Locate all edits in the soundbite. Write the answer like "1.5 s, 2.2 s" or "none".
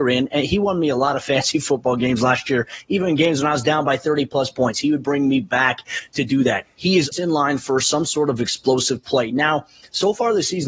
7.1 s